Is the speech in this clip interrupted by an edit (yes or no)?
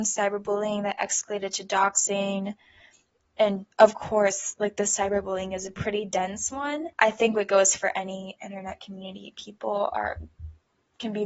yes